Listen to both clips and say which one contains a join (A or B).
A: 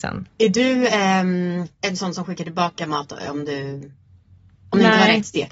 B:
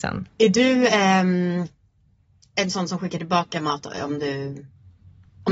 A